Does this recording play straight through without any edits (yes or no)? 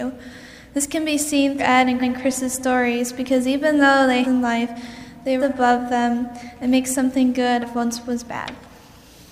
no